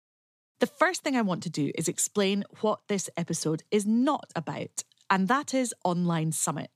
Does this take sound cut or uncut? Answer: uncut